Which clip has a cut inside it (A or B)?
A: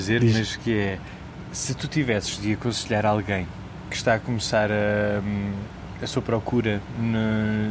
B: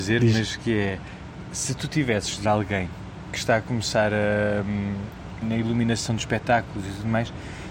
B